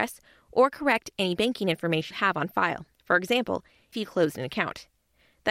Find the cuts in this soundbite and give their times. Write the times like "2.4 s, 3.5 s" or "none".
2.1 s, 2.9 s, 3.9 s